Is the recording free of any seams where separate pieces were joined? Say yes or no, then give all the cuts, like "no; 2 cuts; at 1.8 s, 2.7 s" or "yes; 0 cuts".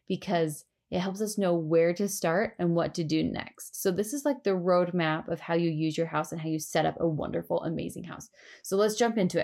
yes; 0 cuts